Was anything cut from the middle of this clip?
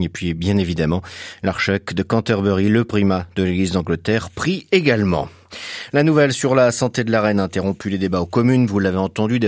no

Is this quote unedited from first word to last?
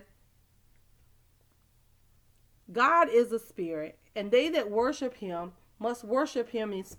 yes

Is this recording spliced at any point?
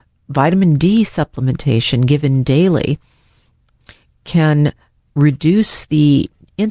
no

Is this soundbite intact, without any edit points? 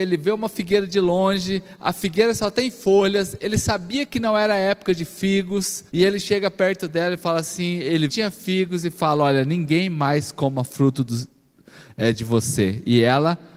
no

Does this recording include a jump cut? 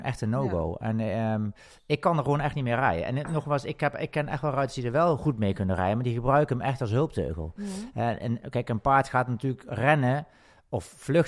no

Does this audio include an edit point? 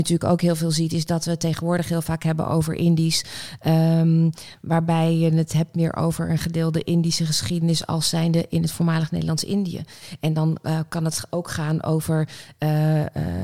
no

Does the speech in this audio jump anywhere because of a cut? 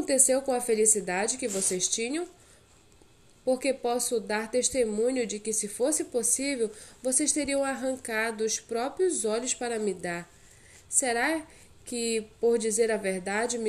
no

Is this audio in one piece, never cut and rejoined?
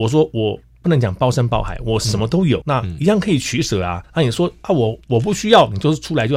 no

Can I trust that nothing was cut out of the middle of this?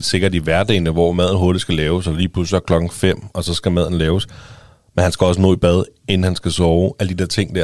yes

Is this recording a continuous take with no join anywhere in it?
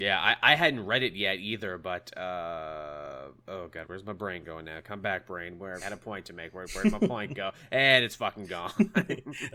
no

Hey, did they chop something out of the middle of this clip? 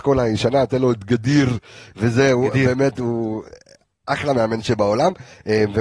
no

